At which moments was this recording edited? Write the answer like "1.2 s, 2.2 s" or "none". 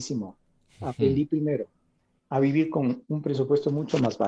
none